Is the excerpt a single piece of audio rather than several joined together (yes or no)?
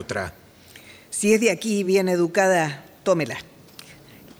yes